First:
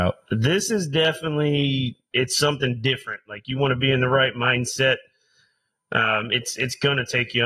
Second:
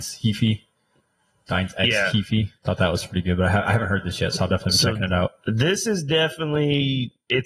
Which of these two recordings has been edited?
second; 1 cut; at 2.6 s

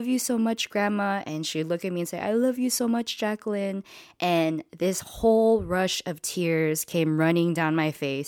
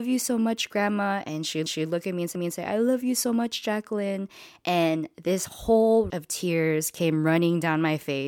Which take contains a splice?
second; 3 cuts; at 1.7 s, 2.3 s, 6.1 s

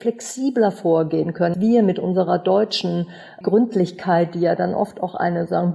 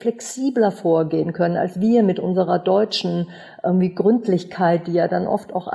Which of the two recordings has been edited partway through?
first; 2 cuts; at 1.5 s, 3.4 s

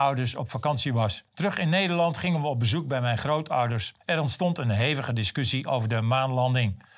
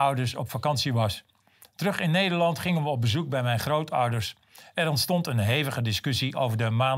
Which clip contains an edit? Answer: first; 2 cuts; at 1.3 s, 4.0 s

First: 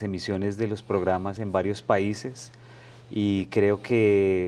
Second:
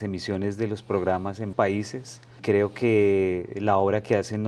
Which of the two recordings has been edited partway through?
second; 2 cuts; at 1.5 s, 2.4 s

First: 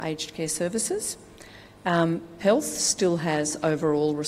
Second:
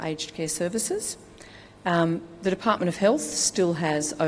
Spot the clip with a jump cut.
first; 1 cut; at 2.4 s

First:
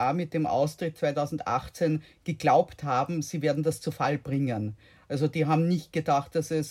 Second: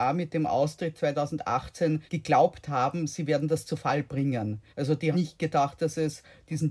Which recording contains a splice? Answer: second; 3 cuts; at 2.1 s, 4.7 s, 5.1 s

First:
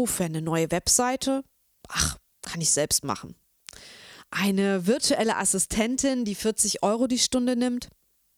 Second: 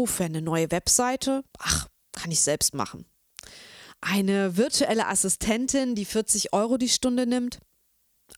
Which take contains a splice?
second; 1 cut; at 1.5 s

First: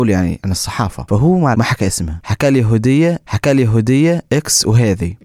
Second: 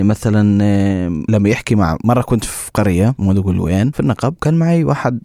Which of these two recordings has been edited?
first; 2 cuts; at 1.5 s, 3.2 s

